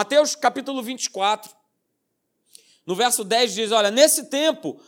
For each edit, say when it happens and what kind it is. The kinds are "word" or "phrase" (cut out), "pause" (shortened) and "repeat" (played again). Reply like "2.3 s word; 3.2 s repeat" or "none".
none

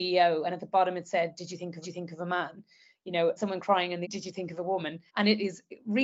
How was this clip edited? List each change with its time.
1.8 s repeat; 3.4 s word; 4.0 s word; 5.1 s pause

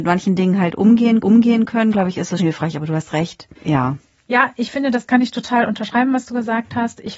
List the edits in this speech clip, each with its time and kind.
1.2 s repeat; 2.4 s word; 3.6 s pause; 5.1 s word

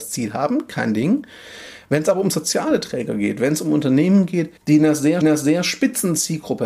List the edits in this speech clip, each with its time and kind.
4.6 s pause; 5.2 s repeat

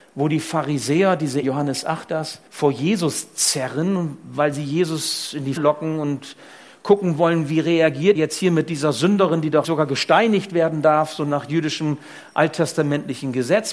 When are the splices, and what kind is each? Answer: 1.4 s word; 2.1 s word; 2.5 s pause; 5.6 s word; 8.1 s word; 9.6 s word

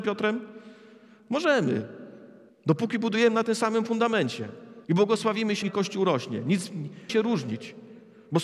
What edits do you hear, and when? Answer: 2.5 s pause; 4.8 s pause; 5.6 s word; 7.1 s word

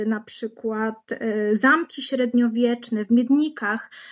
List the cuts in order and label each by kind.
none

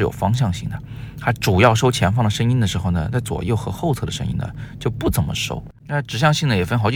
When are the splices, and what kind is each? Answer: 5.8 s pause

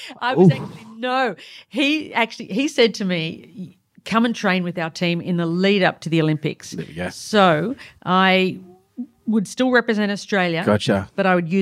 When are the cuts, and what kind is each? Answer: none

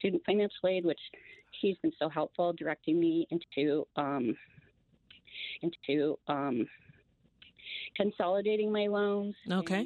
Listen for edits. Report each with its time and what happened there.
5.6 s repeat

